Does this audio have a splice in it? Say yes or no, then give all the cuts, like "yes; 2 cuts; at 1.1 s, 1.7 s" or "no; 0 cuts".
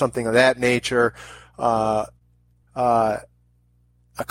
yes; 1 cut; at 2.6 s